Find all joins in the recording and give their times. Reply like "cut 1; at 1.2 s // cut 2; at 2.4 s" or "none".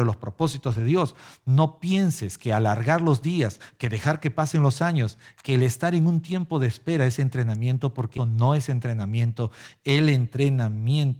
cut 1; at 8.2 s